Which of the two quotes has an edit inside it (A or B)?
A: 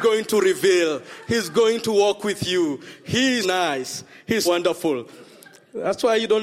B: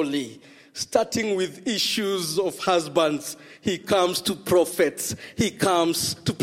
A